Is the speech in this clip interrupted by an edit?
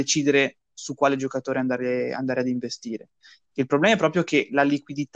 no; 0 cuts

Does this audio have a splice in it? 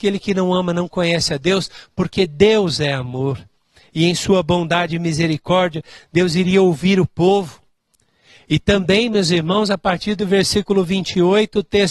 no; 0 cuts

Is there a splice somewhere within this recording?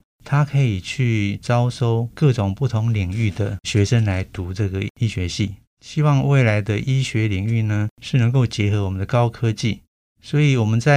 no; 0 cuts

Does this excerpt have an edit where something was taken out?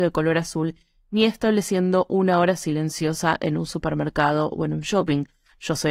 no; 0 cuts

